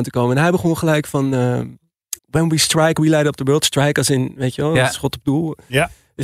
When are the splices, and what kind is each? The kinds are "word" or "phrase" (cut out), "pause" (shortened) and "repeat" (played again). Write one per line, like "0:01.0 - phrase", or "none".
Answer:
0:02.2 - pause